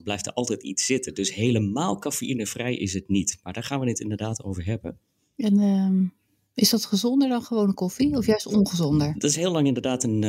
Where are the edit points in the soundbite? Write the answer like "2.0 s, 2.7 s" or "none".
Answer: none